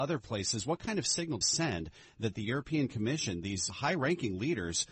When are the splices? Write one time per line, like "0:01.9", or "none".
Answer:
0:01.4
0:03.7